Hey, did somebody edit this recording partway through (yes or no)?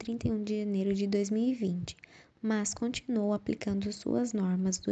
no